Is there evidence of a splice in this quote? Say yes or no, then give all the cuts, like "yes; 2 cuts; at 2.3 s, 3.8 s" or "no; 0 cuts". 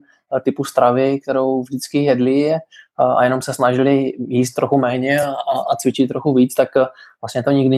no; 0 cuts